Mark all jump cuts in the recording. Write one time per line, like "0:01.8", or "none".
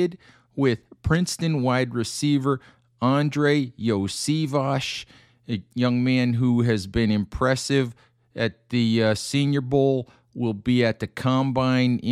none